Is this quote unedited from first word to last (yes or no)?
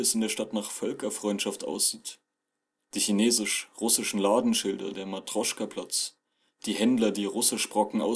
yes